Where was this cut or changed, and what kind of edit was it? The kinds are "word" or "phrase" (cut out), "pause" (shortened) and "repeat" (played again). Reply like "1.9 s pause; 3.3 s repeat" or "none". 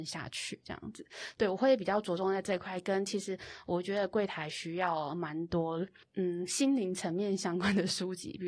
6.0 s pause